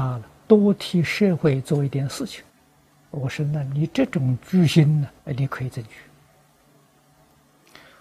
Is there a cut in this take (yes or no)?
yes